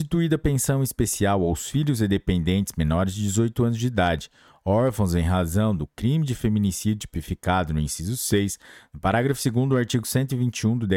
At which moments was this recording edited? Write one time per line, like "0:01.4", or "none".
none